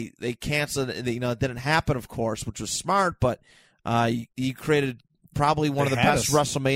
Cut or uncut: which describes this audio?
uncut